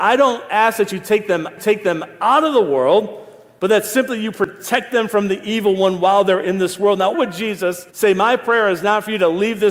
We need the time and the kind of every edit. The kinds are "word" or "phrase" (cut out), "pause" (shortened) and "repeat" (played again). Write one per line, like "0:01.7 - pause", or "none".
0:01.6 - repeat
0:07.1 - word
0:07.9 - pause

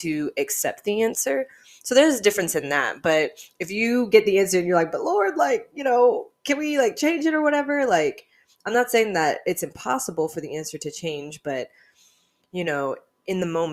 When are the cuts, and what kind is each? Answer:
none

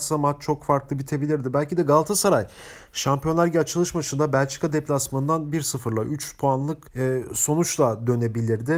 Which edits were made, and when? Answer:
0:06.9 - pause

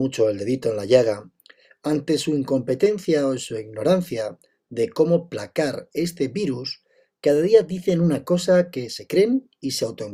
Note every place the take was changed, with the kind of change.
none

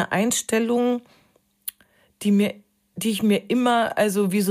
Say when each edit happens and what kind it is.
none

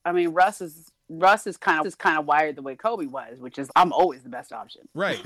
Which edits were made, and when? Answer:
0:01.8 - repeat
0:03.7 - word

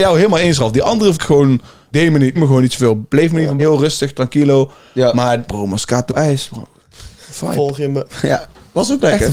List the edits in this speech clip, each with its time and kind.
0:01.1 - word
0:01.9 - word
0:02.3 - word
0:03.6 - word
0:05.5 - word
0:06.1 - word

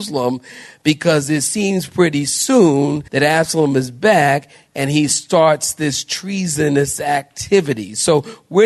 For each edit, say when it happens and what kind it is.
0:03.1 - pause

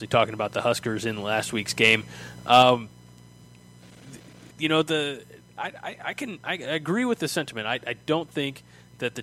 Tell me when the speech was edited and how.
0:04.5 - pause

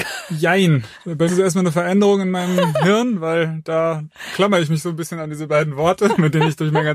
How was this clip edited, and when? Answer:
0:01.3 - word

